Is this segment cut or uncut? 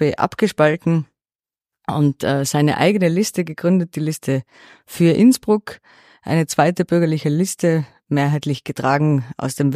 uncut